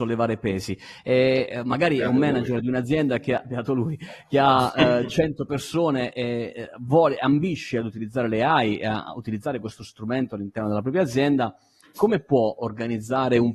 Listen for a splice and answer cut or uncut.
cut